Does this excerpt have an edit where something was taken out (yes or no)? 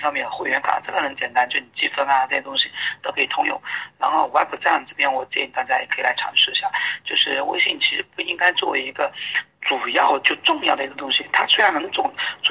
no